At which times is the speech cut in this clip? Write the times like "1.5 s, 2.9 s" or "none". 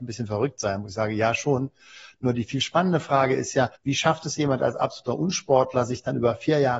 3.7 s

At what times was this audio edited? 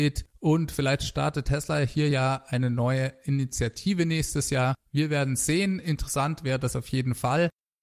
none

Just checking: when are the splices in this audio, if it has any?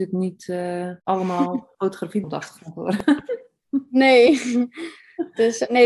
1.0 s, 2.2 s

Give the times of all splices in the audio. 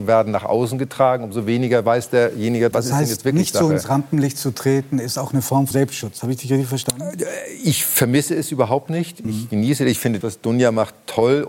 2.7 s, 5.7 s, 10.2 s

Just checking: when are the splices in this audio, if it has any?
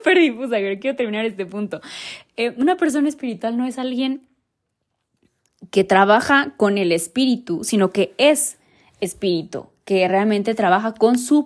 none

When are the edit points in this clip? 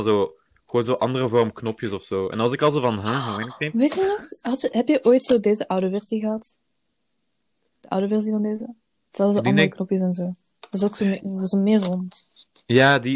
none

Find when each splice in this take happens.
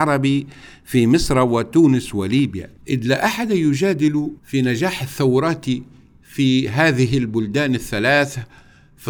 2.8 s, 4.4 s

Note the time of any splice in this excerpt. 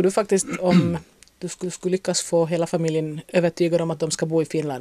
1.6 s

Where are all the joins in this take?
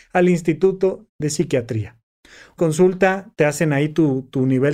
1.1 s, 2.6 s

